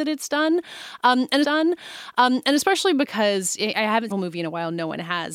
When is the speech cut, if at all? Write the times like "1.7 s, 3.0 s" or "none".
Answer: 1.4 s, 4.1 s